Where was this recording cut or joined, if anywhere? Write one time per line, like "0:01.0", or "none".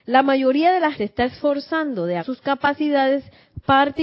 0:00.9
0:02.2